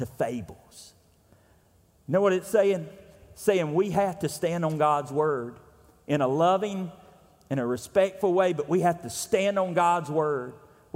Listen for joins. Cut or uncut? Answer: uncut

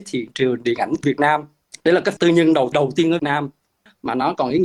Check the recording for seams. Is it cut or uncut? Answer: cut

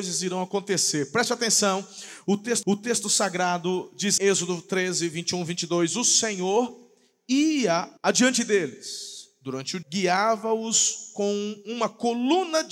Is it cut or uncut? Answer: cut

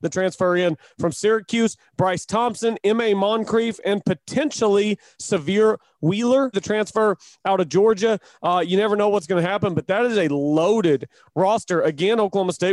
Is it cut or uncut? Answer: cut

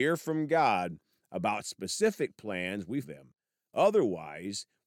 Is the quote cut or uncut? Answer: cut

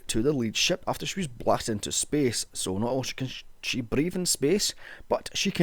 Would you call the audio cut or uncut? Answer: uncut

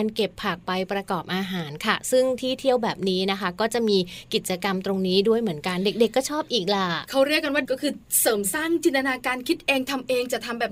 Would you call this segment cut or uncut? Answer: cut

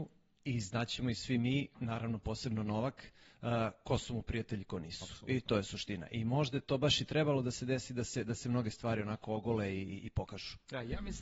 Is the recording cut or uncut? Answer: uncut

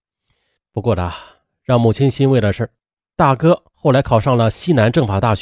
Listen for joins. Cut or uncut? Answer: uncut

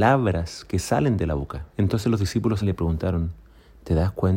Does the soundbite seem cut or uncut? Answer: cut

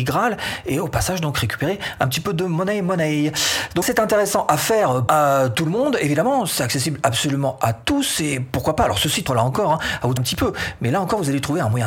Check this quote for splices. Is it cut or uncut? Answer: cut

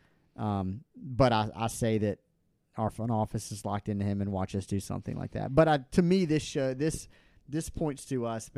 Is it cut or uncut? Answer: uncut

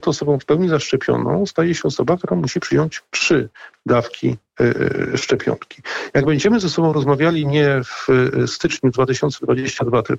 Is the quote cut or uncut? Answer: uncut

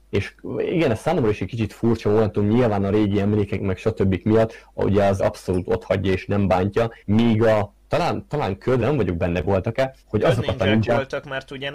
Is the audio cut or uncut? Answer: cut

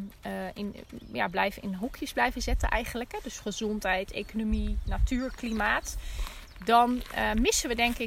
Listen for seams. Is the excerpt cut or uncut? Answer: uncut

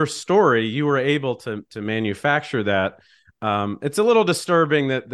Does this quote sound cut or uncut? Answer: uncut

